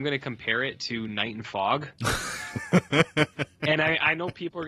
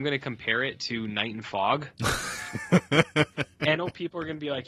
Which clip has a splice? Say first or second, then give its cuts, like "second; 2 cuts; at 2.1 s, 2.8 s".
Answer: second; 1 cut; at 3.8 s